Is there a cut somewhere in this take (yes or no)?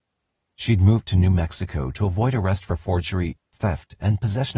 no